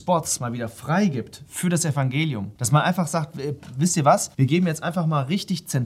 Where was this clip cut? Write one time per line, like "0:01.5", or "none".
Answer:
0:02.6
0:04.3